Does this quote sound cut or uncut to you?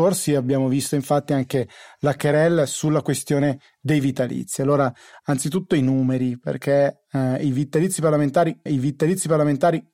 cut